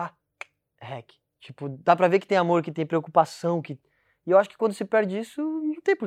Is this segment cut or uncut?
uncut